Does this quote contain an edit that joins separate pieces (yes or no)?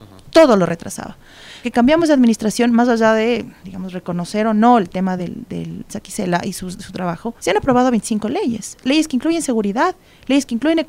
yes